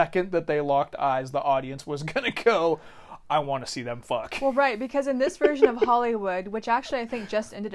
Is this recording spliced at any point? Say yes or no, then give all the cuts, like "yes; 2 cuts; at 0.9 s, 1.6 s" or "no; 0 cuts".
no; 0 cuts